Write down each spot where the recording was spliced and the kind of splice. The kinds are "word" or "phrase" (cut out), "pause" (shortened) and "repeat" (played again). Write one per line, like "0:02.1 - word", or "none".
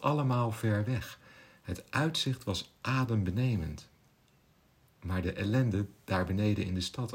none